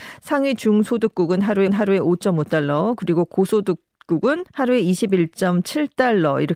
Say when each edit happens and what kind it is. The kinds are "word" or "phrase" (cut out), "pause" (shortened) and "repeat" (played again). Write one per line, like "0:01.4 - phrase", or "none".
0:01.7 - repeat
0:04.5 - pause